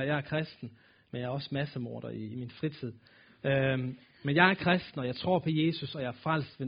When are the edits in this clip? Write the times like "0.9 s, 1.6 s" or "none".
none